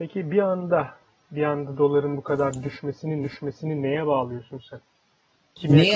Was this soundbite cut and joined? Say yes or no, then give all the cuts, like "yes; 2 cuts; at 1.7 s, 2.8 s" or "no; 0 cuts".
yes; 1 cut; at 3.2 s